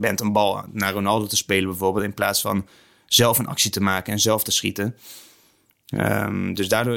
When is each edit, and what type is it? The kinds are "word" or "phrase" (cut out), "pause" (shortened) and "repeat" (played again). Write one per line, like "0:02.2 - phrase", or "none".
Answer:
none